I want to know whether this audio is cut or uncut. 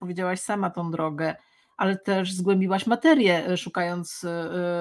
uncut